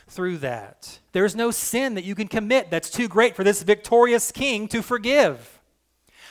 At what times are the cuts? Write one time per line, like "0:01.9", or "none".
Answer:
0:01.1